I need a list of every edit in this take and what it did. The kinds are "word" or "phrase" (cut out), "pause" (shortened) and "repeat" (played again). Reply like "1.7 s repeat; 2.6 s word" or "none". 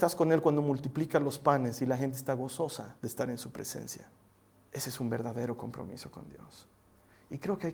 3.0 s pause; 4.3 s pause